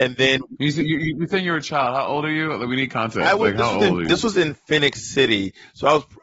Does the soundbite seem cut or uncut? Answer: uncut